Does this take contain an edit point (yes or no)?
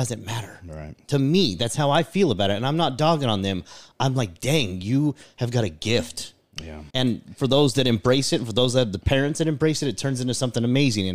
yes